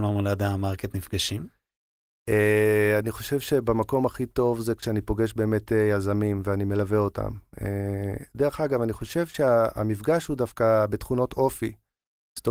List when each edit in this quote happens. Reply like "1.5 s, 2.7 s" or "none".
none